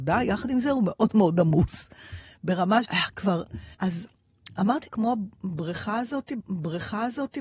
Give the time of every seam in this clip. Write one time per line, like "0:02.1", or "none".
0:02.9
0:03.7
0:04.9
0:06.4

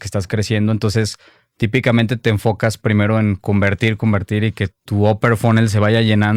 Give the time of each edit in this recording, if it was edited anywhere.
0:04.0
0:04.7

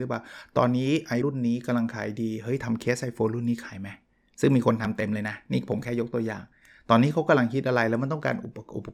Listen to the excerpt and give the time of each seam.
0:01.2

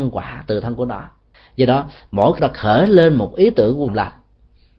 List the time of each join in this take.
0:01.3
0:02.4
0:03.9

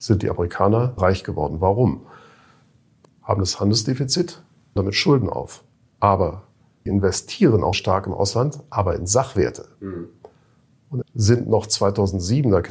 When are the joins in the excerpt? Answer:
0:01.0
0:03.0
0:04.8
0:06.9
0:07.7
0:11.0

